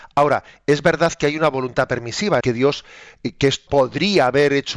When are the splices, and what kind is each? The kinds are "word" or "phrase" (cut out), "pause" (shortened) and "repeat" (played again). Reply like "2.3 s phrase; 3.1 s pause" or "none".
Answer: 2.4 s phrase; 3.7 s word